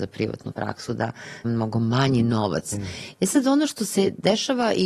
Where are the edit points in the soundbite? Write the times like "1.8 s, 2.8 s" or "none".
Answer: 1.4 s